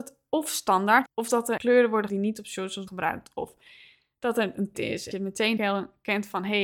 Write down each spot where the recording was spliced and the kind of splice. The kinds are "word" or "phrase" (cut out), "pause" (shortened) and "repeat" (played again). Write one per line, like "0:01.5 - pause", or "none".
0:01.1 - word
0:01.6 - word
0:02.1 - word
0:02.9 - word
0:04.7 - word
0:05.1 - word
0:05.6 - word